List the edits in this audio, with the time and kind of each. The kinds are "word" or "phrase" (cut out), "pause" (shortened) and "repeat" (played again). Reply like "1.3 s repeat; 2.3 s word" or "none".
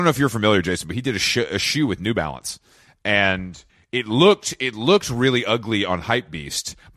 3.7 s pause